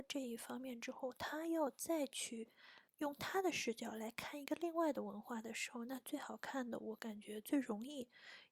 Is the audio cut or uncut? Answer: cut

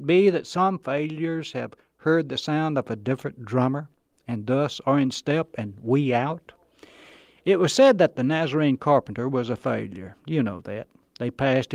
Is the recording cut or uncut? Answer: uncut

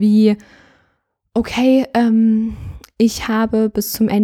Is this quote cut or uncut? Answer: uncut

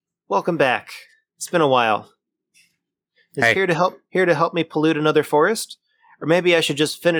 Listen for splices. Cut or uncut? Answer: uncut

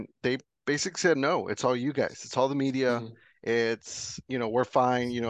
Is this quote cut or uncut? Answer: uncut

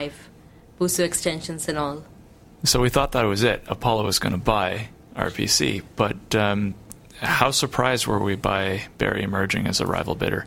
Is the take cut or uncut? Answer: uncut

